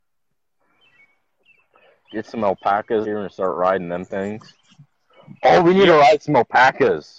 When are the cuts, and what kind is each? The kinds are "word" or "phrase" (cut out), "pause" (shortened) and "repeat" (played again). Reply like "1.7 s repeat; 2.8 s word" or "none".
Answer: 3.0 s word